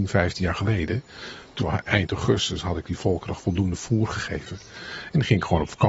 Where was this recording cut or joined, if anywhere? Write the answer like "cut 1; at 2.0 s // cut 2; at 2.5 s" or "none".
cut 1; at 1.6 s // cut 2; at 3.4 s